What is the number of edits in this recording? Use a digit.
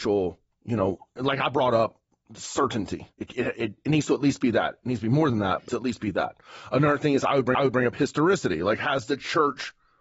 3